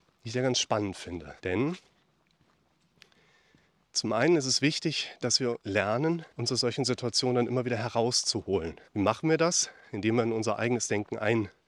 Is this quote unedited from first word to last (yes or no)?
no